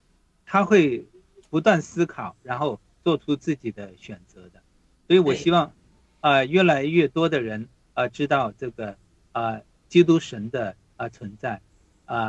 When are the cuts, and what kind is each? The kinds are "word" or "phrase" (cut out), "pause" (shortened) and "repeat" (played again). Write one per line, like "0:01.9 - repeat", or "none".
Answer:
none